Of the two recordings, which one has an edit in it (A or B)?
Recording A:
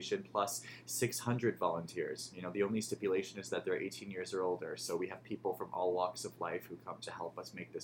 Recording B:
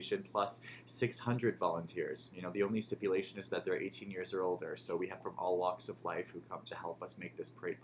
B